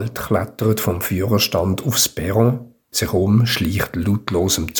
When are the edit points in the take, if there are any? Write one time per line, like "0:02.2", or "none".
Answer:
0:02.9